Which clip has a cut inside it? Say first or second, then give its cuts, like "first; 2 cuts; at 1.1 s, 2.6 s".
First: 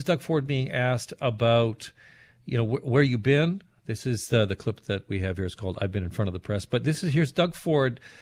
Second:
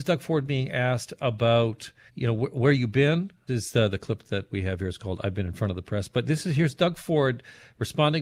second; 2 cuts; at 2.1 s, 3.5 s